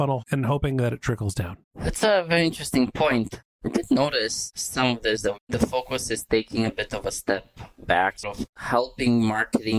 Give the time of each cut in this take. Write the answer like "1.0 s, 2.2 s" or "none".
1.6 s, 8.2 s